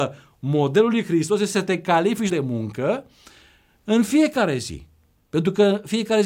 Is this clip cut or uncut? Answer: cut